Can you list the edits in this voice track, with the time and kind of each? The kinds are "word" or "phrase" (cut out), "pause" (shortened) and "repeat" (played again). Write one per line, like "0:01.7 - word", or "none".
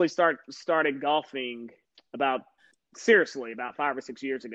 none